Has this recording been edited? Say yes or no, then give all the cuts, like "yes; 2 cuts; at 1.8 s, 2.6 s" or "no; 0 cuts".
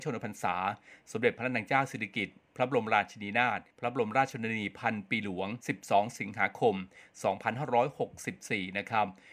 yes; 2 cuts; at 3.7 s, 5.6 s